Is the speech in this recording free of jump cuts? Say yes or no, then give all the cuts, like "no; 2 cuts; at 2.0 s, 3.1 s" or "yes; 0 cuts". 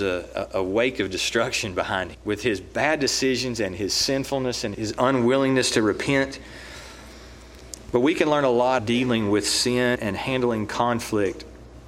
no; 4 cuts; at 2.1 s, 4.7 s, 8.8 s, 10.0 s